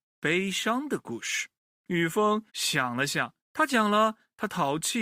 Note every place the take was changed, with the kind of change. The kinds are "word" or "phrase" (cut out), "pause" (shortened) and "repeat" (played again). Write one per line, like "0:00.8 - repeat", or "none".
0:01.6 - pause
0:02.5 - pause
0:03.4 - pause